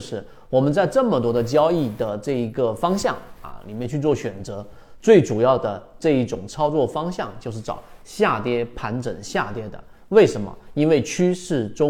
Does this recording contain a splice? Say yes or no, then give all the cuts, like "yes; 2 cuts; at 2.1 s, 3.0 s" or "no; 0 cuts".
no; 0 cuts